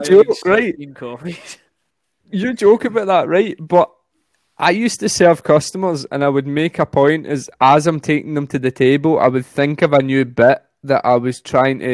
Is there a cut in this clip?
no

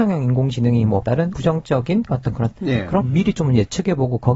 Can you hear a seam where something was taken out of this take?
yes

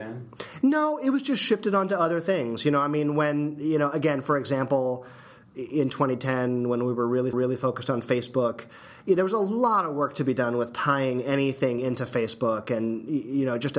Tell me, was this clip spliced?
yes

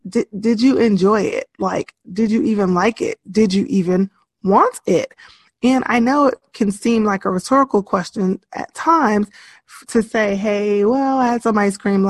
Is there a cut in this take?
no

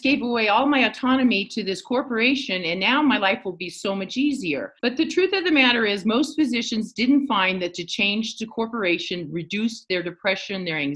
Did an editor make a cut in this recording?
yes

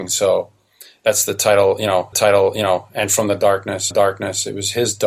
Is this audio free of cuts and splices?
no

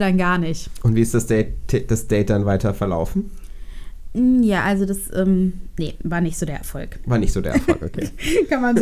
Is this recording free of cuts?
yes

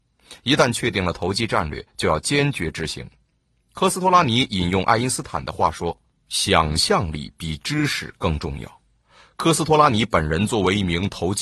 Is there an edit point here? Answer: no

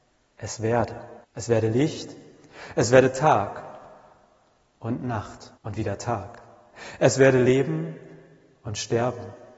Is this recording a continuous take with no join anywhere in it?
no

